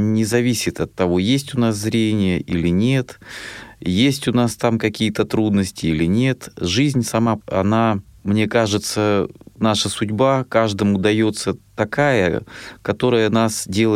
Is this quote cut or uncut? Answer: cut